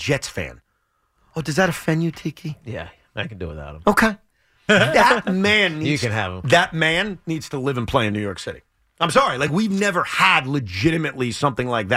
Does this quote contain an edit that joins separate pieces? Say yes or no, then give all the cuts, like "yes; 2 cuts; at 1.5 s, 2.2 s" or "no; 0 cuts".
no; 0 cuts